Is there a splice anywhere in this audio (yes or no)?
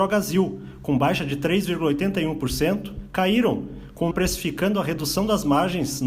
yes